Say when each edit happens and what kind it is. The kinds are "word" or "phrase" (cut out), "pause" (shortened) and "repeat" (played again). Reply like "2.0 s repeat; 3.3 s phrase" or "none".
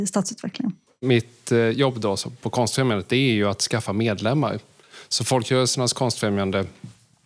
none